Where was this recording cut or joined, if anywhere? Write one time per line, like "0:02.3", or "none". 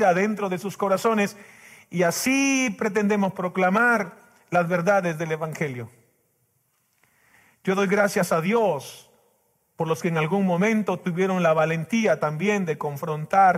none